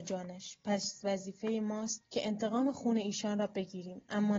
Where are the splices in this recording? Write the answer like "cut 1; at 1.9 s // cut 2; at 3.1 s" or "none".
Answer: cut 1; at 2.0 s